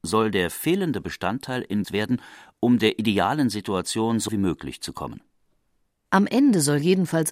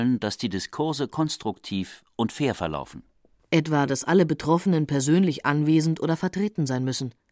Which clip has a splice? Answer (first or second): first